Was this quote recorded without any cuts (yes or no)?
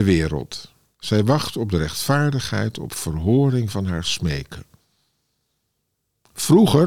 yes